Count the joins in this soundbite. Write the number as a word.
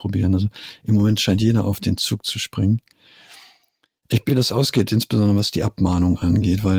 one